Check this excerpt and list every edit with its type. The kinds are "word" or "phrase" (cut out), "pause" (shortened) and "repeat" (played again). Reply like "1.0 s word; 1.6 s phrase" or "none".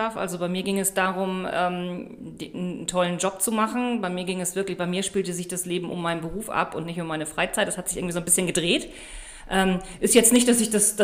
none